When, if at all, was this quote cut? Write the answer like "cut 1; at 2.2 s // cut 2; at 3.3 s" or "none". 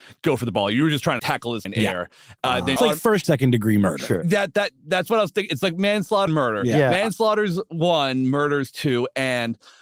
cut 1; at 1.2 s // cut 2; at 1.7 s // cut 3; at 2.8 s // cut 4; at 3.2 s // cut 5; at 6.3 s